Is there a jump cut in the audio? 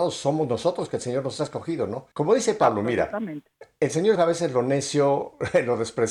yes; 2 cuts; at 2.1 s, 4.2 s

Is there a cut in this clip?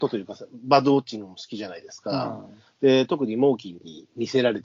no; 0 cuts

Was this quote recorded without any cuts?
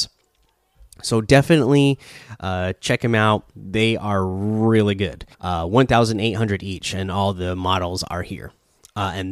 no; 2 cuts; at 3.5 s, 5.3 s

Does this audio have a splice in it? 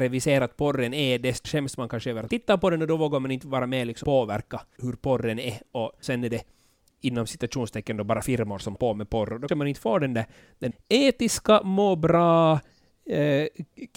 yes; 9 cuts; at 1.4 s, 2.3 s, 4.0 s, 4.8 s, 6.0 s, 8.2 s, 8.8 s, 9.5 s, 10.7 s

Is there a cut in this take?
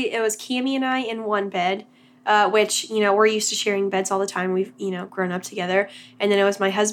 no; 0 cuts

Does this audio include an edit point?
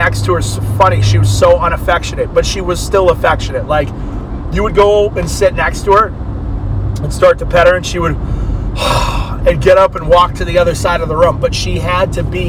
no; 0 cuts

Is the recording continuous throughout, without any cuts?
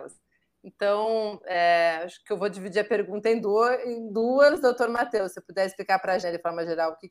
no; 1 cut; at 6.2 s

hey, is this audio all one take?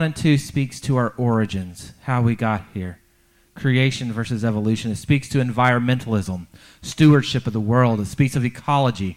yes; 0 cuts

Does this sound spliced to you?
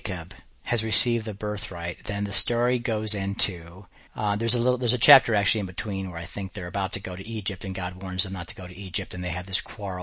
yes; 1 cut; at 4.1 s

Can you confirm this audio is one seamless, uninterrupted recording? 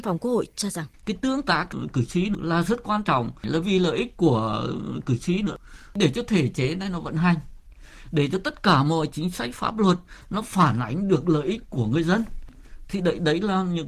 no; 1 cut; at 0.9 s

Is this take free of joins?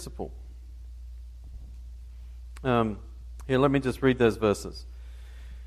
yes; 0 cuts

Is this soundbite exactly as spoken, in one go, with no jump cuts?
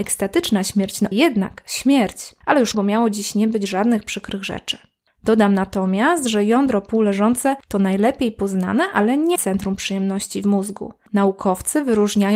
no; 3 cuts; at 1.1 s, 2.7 s, 9.3 s

